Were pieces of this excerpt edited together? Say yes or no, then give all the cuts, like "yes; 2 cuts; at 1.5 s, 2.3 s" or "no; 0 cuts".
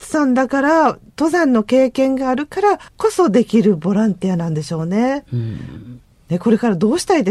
yes; 1 cut; at 2.9 s